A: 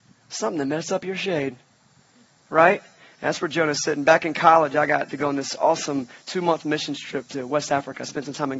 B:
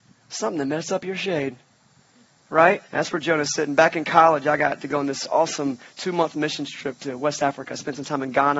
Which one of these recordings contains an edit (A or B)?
B